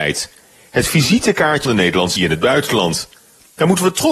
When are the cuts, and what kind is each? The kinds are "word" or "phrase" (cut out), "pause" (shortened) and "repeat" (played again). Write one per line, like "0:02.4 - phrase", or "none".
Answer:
0:01.7 - word
0:02.2 - word